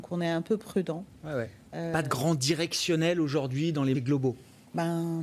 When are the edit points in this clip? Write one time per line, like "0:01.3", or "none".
0:03.9